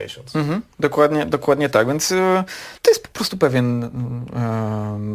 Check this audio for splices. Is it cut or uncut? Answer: cut